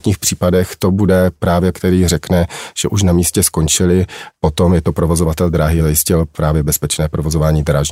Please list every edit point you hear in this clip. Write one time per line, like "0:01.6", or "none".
0:01.7
0:05.8